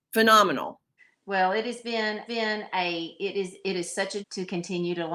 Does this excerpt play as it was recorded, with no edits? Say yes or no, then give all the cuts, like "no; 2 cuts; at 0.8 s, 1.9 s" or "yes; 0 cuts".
no; 3 cuts; at 1.0 s, 2.3 s, 4.2 s